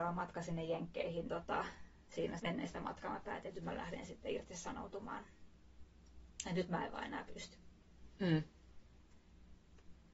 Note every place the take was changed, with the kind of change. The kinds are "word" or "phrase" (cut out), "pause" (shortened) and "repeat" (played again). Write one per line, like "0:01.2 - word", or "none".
0:01.3 - word
0:02.4 - word